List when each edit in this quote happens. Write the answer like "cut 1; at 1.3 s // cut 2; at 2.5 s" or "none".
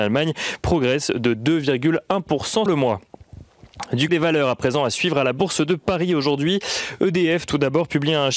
cut 1; at 2.7 s // cut 2; at 4.1 s